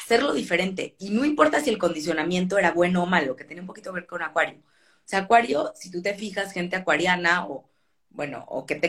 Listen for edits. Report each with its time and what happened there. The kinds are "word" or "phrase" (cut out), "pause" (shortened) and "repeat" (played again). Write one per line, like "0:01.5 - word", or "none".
none